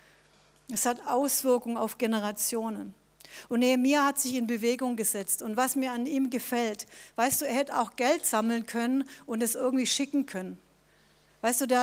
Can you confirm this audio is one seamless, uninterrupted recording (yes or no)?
yes